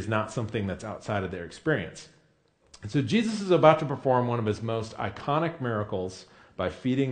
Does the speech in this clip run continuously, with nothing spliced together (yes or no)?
yes